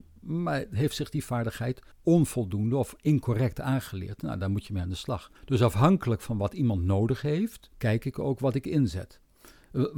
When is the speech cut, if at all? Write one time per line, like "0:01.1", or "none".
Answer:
0:01.9
0:05.3
0:07.7